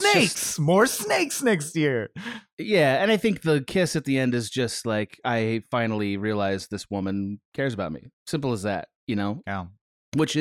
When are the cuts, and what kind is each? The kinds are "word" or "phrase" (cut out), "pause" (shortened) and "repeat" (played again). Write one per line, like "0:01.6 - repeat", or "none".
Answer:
0:08.2 - pause
0:09.0 - pause
0:09.4 - word